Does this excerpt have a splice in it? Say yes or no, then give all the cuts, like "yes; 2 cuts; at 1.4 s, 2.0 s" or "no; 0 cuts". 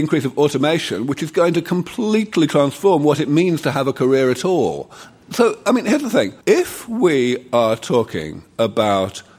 yes; 1 cut; at 6.4 s